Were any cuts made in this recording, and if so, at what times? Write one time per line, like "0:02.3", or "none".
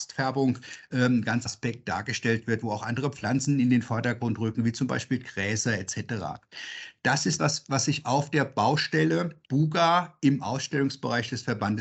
0:01.5
0:07.4
0:09.4